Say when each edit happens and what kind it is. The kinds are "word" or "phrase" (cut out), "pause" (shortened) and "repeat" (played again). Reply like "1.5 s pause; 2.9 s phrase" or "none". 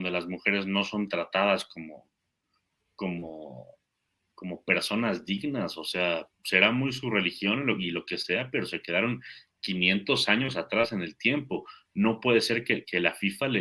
none